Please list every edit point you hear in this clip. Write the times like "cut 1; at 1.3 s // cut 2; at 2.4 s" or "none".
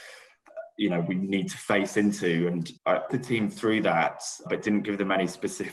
cut 1; at 2.8 s // cut 2; at 3.1 s // cut 3; at 4.5 s